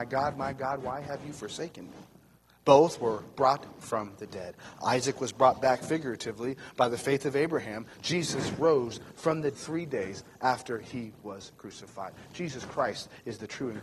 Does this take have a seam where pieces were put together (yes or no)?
yes